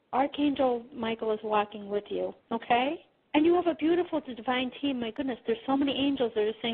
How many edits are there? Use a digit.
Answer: 1